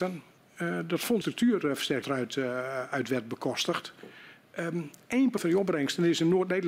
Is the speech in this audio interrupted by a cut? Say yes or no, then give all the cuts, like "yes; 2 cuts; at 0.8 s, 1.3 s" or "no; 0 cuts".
yes; 3 cuts; at 1.2 s, 2.0 s, 5.4 s